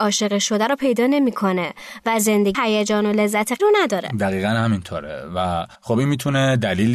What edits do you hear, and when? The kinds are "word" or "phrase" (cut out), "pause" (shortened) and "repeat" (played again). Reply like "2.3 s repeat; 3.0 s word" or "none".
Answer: 2.5 s word; 3.6 s word; 5.8 s pause